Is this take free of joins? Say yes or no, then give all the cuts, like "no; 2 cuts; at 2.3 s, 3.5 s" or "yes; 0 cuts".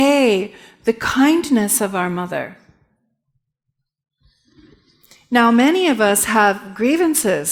yes; 0 cuts